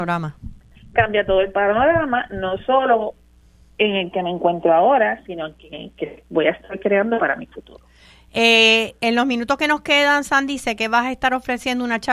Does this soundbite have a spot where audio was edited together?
no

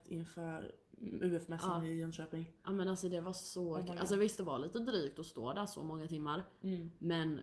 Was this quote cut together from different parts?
no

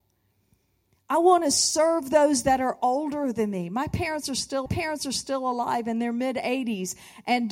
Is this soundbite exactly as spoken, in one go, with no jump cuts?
no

